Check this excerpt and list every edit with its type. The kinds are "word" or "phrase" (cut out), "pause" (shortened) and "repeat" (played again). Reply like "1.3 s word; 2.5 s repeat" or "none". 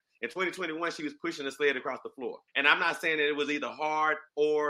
2.5 s pause